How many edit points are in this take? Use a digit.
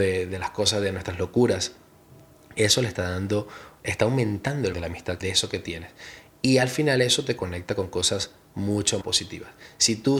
4